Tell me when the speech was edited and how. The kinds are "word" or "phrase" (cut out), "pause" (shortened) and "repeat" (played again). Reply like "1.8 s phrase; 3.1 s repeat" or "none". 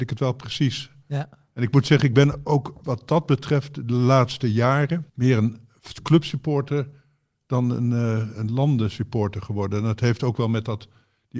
5.1 s pause; 8.3 s word